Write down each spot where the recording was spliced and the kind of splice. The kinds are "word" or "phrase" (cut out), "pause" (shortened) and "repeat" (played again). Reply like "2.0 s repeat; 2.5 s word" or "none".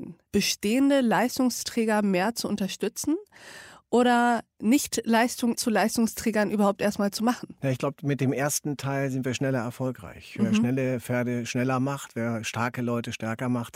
5.6 s word